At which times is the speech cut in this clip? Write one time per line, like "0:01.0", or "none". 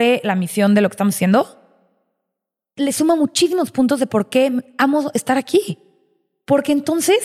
none